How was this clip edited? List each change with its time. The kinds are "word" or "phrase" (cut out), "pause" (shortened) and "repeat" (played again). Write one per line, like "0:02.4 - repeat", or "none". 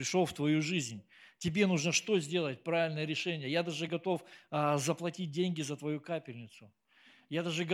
none